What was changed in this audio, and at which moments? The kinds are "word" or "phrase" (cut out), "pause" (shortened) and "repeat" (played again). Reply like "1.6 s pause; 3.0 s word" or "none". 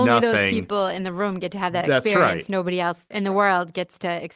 none